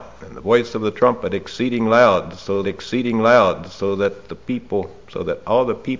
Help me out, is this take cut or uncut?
cut